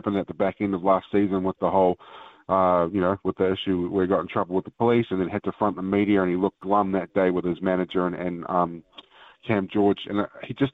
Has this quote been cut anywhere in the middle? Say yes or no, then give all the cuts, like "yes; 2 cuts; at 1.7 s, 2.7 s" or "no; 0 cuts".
no; 0 cuts